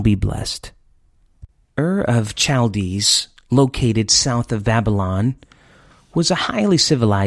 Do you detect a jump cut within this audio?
no; 0 cuts

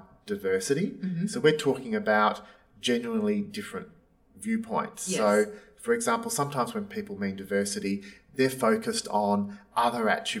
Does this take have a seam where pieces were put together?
no; 0 cuts

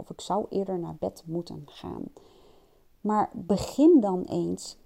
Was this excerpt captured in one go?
yes; 0 cuts

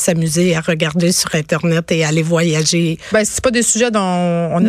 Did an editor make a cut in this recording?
no; 0 cuts

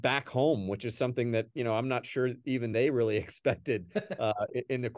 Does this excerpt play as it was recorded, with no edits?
yes; 0 cuts

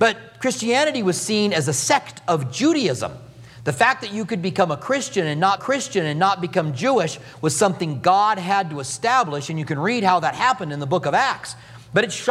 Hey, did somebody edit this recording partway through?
yes; 1 cut; at 5.6 s

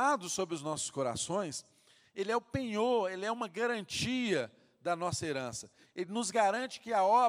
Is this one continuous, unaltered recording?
yes; 0 cuts

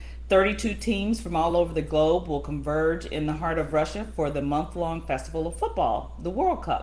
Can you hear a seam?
no; 0 cuts

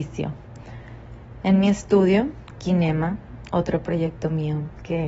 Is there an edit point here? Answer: no; 0 cuts

